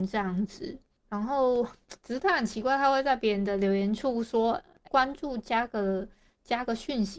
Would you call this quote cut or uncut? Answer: cut